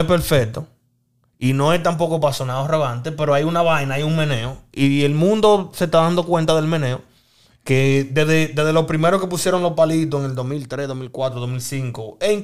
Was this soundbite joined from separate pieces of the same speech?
no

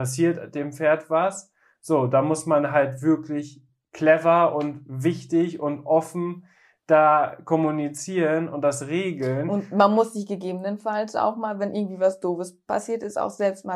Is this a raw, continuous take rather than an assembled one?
yes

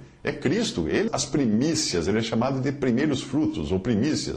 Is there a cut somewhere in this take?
yes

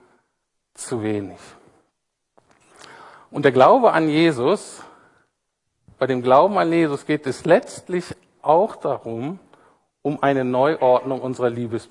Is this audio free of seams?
yes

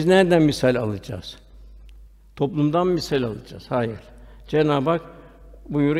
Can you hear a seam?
no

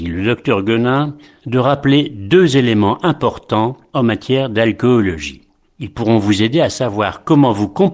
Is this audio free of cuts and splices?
yes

